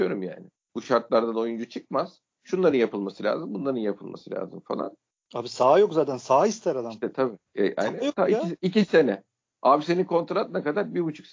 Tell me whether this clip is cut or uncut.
uncut